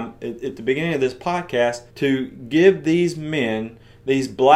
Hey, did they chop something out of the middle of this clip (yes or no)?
yes